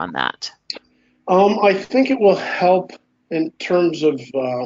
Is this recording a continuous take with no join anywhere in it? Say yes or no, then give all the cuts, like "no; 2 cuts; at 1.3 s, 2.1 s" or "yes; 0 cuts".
yes; 0 cuts